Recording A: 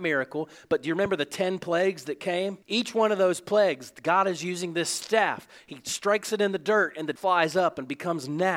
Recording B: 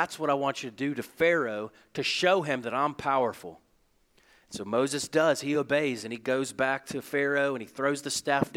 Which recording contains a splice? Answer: A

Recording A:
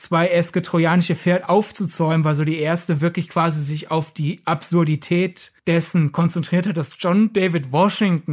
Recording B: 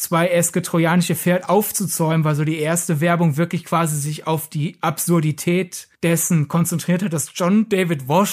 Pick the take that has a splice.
A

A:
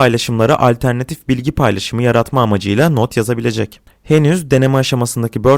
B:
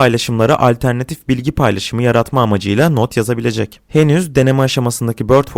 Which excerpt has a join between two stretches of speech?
B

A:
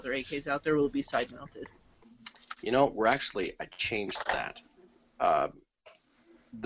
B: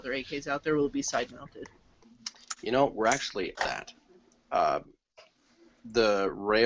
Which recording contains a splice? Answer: B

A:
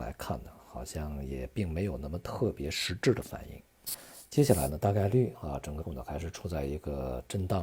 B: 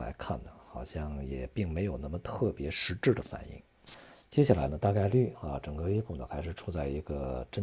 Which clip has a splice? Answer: A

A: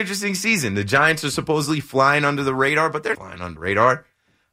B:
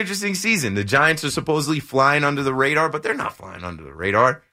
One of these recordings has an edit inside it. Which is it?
A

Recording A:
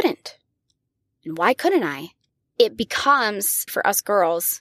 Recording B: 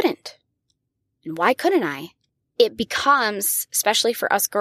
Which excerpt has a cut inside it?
A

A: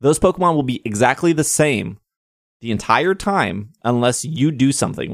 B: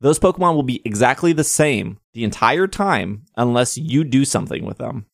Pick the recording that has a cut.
B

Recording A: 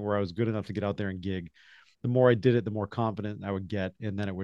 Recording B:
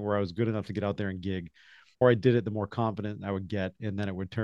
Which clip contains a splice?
B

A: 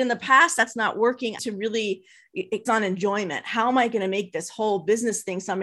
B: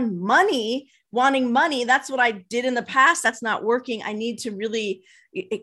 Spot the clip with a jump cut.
A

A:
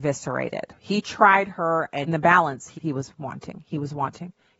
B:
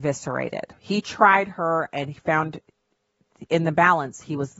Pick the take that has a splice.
A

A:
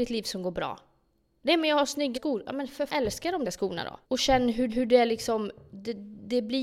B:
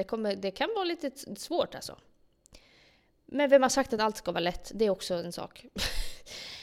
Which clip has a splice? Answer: A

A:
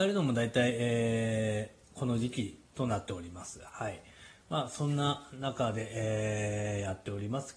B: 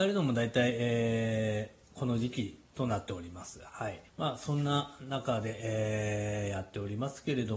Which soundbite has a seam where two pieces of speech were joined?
B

